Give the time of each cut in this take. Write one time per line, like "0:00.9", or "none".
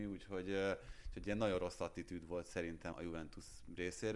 0:02.9